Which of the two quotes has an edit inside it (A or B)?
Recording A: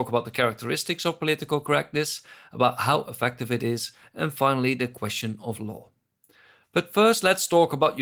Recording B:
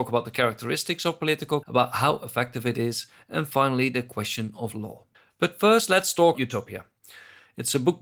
B